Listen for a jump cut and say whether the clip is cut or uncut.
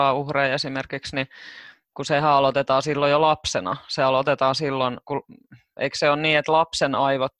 cut